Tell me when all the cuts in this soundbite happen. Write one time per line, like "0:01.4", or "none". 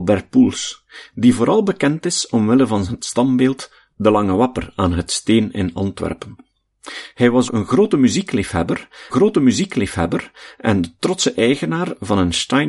0:07.5
0:09.1